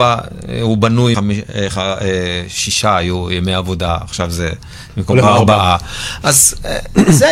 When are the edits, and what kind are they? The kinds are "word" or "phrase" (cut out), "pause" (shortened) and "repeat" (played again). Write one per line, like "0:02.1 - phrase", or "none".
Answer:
0:01.1 - word
0:05.2 - word

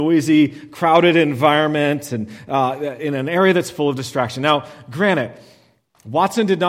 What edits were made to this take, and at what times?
none

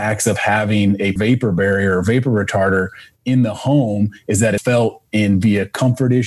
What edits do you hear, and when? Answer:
0:01.2 - word
0:04.6 - word

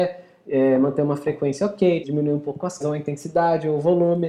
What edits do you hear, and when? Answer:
0:02.0 - word
0:02.8 - word

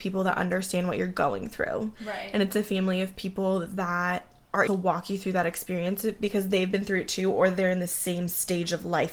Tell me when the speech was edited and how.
0:04.7 - phrase

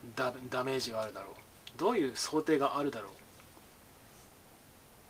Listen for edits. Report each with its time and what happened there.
none

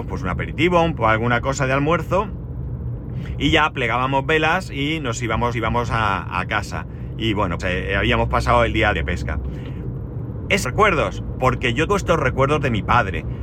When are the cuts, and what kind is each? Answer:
0:01.0 - phrase
0:05.5 - repeat
0:07.6 - word
0:08.9 - word
0:10.6 - phrase
0:11.9 - word

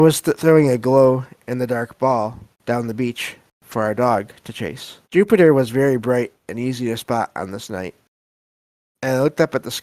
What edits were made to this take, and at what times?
0:02.5 - pause
0:05.0 - pause

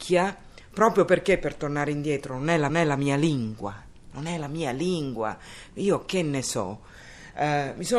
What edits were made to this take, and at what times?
0:02.7 - repeat

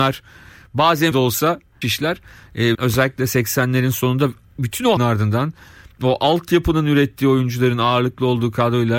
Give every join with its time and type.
0:01.1 - word
0:01.8 - word
0:02.7 - word
0:05.0 - word

